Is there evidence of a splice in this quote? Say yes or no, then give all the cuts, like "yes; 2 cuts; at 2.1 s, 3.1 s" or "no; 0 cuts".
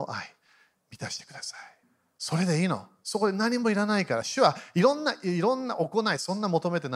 yes; 1 cut; at 1.8 s